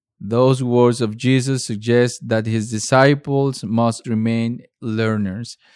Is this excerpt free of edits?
no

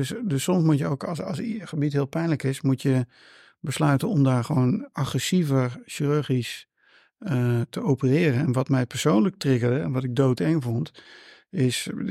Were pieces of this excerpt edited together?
no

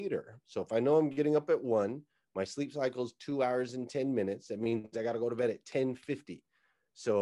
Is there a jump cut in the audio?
no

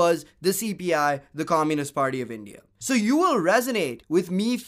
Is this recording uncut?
yes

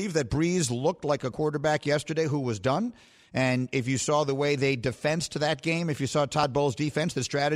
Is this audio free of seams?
yes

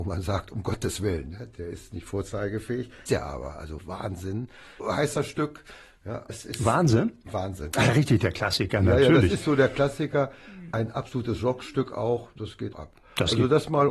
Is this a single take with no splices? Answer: no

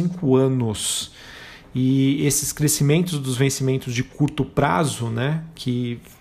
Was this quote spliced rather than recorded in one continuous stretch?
no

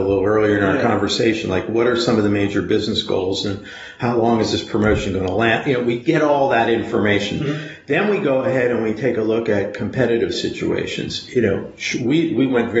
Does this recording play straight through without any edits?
yes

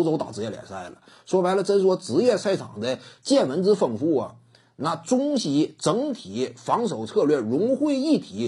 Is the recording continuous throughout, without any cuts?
yes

